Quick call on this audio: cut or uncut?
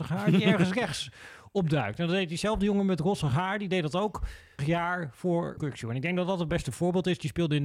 cut